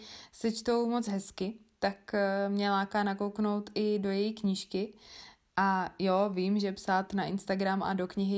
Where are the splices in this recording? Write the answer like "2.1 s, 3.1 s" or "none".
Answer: none